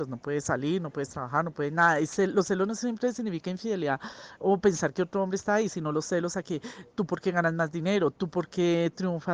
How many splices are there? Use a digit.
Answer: 0